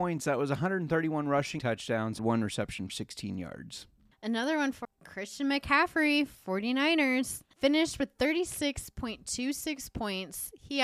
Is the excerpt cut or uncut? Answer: cut